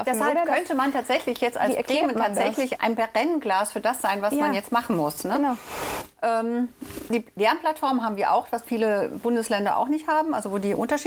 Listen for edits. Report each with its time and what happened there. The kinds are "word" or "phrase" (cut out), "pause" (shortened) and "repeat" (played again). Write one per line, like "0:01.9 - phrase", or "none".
0:02.8 - word
0:07.1 - word

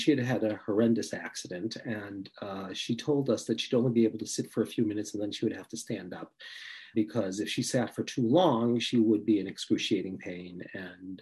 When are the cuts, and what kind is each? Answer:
0:06.9 - word

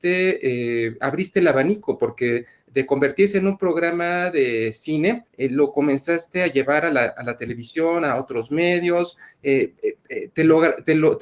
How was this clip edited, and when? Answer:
0:05.3 - pause
0:10.3 - pause

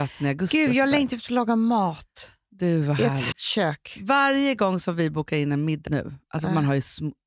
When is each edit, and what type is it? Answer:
0:03.3 - word
0:05.9 - word

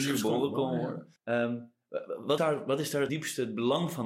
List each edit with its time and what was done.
0:01.2 - pause
0:02.4 - word
0:03.1 - word

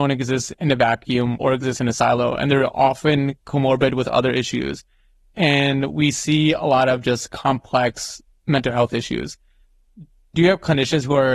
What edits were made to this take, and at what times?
none

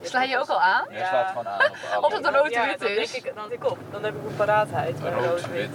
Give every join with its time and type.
0:02.1 - word
0:03.5 - word
0:04.3 - word

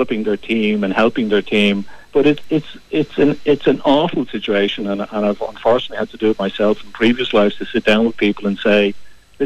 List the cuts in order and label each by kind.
0:02.0 - pause

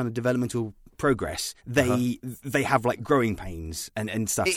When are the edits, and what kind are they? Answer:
0:01.6 - pause

